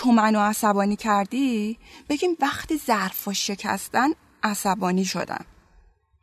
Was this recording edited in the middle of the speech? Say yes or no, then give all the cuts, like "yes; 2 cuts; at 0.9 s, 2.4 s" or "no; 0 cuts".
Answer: no; 0 cuts